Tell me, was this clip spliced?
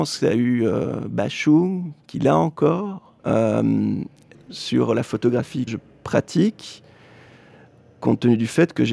yes; 4 cuts; at 2.0 s, 3.2 s, 4.3 s, 5.7 s

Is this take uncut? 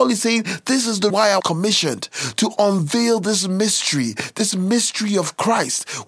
no; 2 cuts; at 1.1 s, 1.4 s

